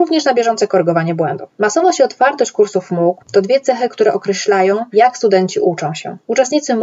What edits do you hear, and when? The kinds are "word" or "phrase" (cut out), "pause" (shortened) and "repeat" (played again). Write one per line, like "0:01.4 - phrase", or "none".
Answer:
0:03.2 - pause